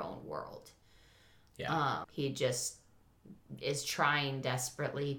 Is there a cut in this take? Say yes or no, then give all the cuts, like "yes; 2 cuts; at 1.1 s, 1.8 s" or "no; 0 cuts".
yes; 1 cut; at 2.0 s